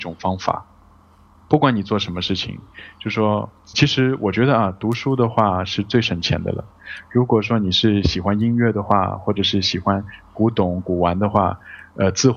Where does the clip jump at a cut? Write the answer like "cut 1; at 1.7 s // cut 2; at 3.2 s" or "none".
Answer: cut 1; at 3.7 s